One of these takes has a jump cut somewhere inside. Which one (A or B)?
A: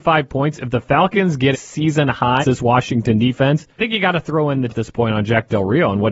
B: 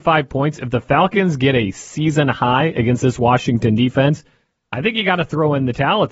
A